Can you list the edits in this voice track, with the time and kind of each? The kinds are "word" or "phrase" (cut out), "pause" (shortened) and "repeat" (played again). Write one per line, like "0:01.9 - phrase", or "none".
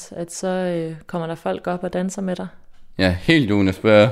none